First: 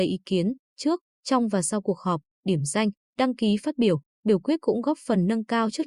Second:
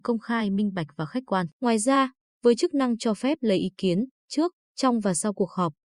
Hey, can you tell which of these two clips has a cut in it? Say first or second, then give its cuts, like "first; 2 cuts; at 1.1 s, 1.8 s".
second; 1 cut; at 1.5 s